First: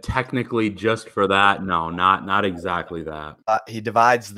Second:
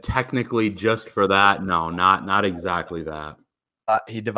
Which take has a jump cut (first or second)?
first